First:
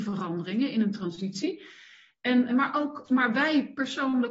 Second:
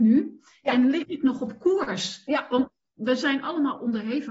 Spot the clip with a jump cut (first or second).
first